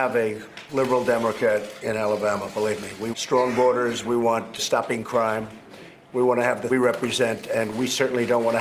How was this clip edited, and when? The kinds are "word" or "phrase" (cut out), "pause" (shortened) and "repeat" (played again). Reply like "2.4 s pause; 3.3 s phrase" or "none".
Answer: 3.1 s word; 4.6 s word; 6.7 s phrase